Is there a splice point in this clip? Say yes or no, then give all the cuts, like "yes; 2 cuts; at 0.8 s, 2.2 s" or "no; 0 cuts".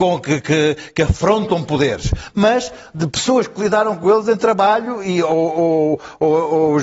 no; 0 cuts